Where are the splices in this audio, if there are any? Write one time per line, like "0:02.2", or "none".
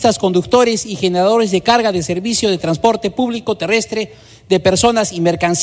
none